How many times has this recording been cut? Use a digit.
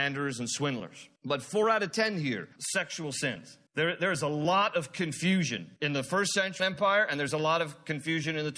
5